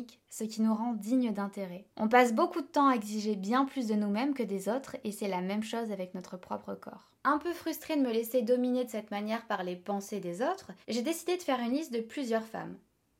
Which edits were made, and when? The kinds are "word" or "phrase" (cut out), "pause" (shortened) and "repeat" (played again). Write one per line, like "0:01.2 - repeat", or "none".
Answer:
0:01.9 - pause
0:07.2 - pause
0:10.8 - pause